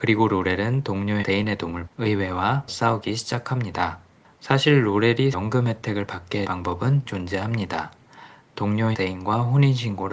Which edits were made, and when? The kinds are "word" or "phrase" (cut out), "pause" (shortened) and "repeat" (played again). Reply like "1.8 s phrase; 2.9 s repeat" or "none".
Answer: 1.2 s word; 1.9 s word; 2.7 s word; 5.3 s word; 6.4 s word; 7.1 s word; 8.9 s word